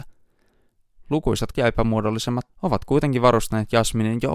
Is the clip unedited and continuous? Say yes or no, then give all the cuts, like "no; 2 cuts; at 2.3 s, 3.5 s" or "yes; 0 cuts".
no; 2 cuts; at 1.5 s, 2.5 s